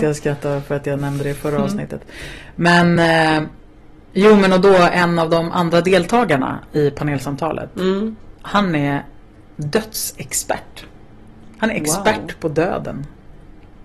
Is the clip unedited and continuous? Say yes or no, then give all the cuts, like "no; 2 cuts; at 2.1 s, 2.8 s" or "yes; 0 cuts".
yes; 0 cuts